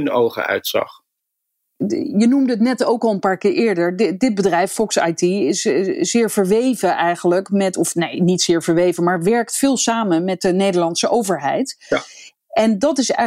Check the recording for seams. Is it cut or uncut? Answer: uncut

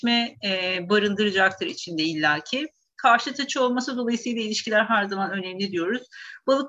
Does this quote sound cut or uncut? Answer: uncut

